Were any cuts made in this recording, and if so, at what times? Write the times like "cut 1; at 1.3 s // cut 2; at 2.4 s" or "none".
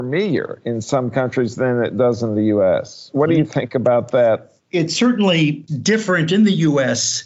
none